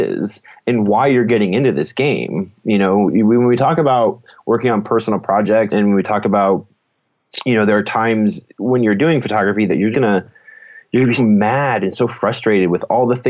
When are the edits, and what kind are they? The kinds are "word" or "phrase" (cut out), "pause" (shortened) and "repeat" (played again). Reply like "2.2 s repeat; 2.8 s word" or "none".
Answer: 5.7 s word; 9.9 s word; 11.2 s word